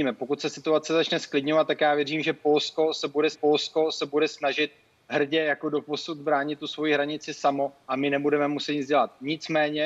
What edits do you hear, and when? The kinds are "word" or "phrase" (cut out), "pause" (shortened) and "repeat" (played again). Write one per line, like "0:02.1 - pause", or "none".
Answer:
0:03.3 - repeat
0:07.8 - pause